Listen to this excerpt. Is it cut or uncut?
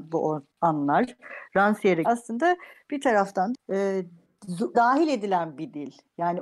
cut